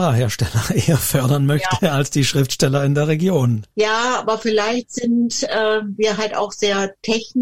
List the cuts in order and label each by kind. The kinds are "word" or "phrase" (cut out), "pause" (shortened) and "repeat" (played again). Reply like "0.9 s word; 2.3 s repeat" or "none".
3.7 s pause